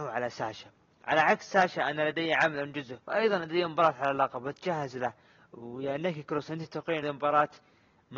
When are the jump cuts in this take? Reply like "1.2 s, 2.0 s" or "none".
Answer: 3.0 s, 7.0 s